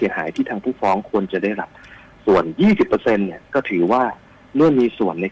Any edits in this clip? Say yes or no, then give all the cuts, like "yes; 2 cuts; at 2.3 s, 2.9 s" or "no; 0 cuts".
no; 0 cuts